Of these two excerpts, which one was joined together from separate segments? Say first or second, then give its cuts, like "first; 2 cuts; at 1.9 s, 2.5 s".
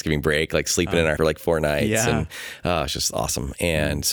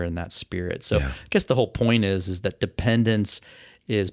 first; 1 cut; at 1.2 s